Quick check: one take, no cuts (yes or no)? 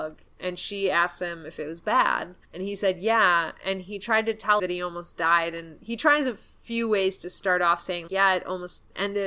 no